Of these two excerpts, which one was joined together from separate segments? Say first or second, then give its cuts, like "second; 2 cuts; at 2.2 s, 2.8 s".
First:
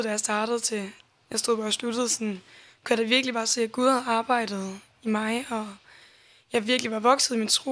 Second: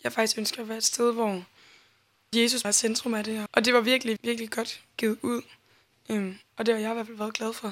second; 4 cuts; at 2.3 s, 2.6 s, 3.5 s, 4.2 s